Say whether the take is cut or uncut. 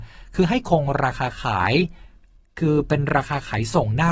uncut